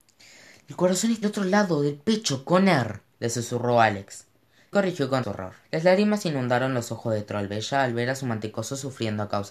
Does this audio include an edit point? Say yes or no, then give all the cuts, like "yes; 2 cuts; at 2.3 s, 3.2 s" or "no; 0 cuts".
yes; 5 cuts; at 1.2 s, 3.1 s, 4.7 s, 5.2 s, 5.6 s